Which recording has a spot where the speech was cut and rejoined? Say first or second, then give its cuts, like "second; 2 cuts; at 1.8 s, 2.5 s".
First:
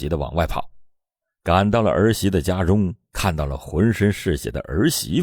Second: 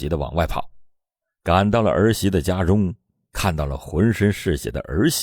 first; 1 cut; at 3.0 s